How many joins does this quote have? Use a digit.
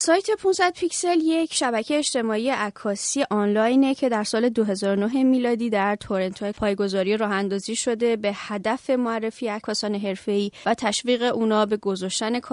1